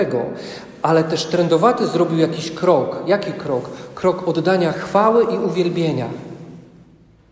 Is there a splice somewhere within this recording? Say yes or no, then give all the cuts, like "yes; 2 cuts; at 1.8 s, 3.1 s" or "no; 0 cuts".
no; 0 cuts